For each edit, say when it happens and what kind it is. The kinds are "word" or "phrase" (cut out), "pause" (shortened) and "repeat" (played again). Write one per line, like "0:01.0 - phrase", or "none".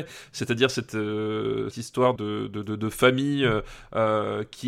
0:01.7 - word
0:02.2 - word